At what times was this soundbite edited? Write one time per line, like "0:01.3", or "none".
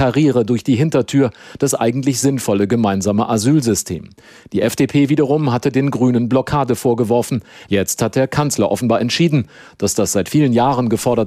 none